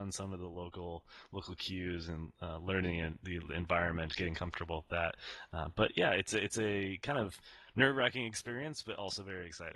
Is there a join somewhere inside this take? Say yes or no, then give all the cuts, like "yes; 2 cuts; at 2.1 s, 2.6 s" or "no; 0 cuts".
no; 0 cuts